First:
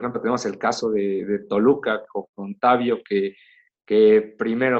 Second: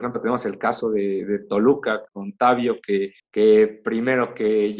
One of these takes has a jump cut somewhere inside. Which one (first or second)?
second